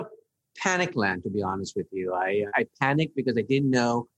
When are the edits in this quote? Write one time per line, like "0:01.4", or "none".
0:02.5

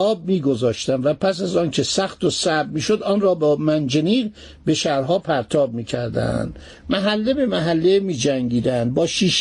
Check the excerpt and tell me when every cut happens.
none

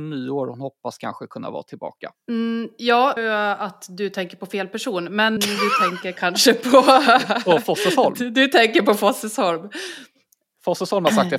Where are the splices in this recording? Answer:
0:02.2
0:03.2
0:05.4

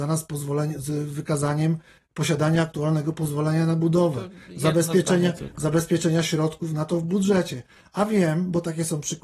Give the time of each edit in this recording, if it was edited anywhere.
none

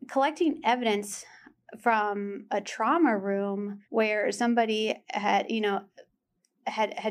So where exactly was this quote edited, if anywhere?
0:03.8

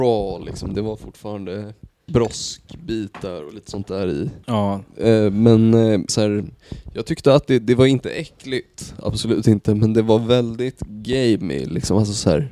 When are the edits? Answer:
0:02.1
0:04.4
0:06.1

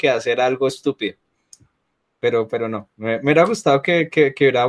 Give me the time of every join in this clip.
none

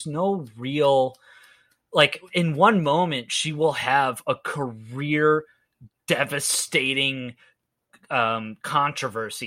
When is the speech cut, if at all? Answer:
none

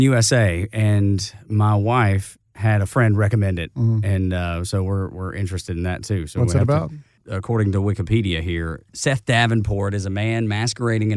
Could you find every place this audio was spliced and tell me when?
0:02.5

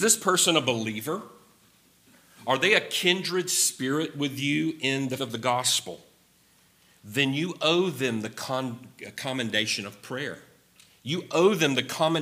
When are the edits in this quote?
0:05.2

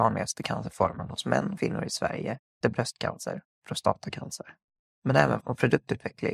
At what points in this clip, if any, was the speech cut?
0:01.6
0:02.6
0:04.8
0:05.4

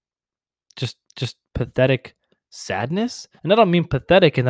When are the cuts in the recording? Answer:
0:01.1
0:03.4

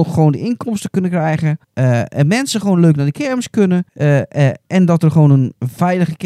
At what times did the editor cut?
0:01.6
0:03.9

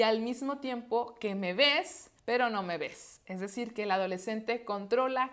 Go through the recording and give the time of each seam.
0:02.2

